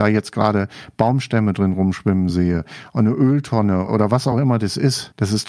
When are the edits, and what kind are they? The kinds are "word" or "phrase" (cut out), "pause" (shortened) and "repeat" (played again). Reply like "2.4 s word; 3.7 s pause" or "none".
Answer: none